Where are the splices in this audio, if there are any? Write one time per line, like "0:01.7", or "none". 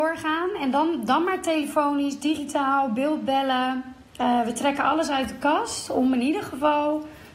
none